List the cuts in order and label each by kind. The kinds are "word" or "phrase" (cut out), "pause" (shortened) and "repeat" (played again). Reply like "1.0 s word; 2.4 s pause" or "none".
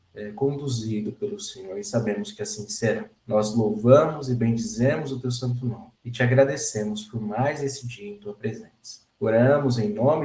3.2 s pause; 6.0 s pause; 9.1 s pause